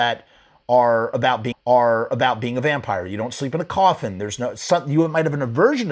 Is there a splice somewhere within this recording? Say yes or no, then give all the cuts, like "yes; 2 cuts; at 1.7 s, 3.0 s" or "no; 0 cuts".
yes; 1 cut; at 1.5 s